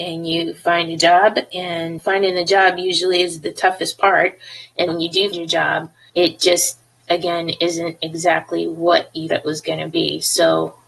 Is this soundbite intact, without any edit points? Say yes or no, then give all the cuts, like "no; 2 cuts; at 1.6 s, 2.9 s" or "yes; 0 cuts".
no; 5 cuts; at 2.0 s, 4.9 s, 5.3 s, 6.1 s, 9.3 s